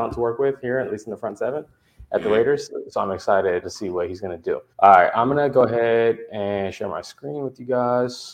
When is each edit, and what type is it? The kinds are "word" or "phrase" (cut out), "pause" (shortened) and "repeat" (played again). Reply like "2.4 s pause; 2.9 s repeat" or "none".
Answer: 3.6 s word; 4.7 s pause

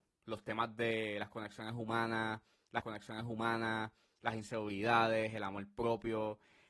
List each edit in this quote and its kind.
2.8 s repeat

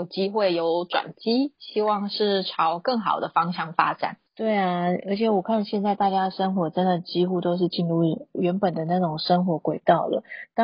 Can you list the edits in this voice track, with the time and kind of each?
4.3 s pause

